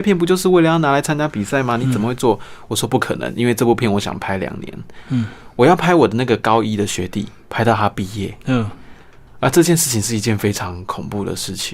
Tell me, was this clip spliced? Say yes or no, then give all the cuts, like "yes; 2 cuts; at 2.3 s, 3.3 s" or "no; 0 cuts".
no; 0 cuts